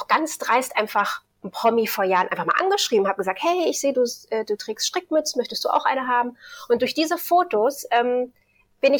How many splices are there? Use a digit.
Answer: 0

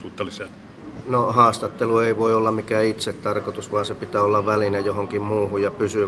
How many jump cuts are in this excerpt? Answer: 0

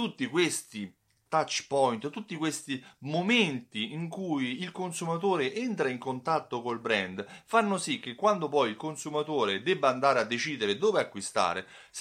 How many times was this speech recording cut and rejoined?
0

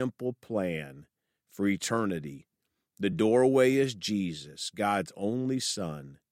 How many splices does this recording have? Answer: 0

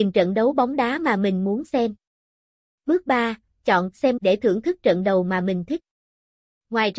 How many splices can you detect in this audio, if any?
1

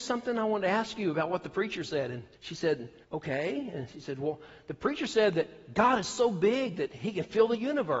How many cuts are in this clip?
2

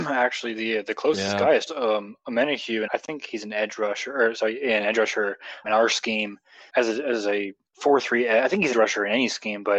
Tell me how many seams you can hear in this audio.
6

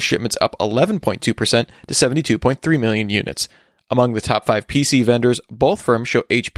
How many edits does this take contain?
0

